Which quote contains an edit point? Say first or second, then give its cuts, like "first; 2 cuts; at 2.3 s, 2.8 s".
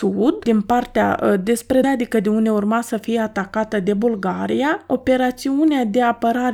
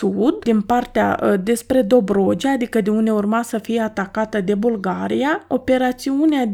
first; 1 cut; at 1.8 s